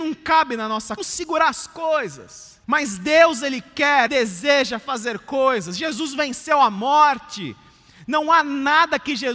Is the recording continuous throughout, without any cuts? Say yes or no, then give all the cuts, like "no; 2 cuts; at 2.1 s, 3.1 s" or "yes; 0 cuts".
no; 3 cuts; at 1.0 s, 2.6 s, 4.1 s